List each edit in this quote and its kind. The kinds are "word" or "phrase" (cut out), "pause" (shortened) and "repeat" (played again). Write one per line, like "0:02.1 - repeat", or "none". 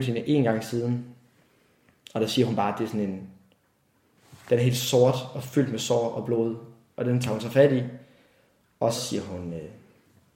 0:08.9 - word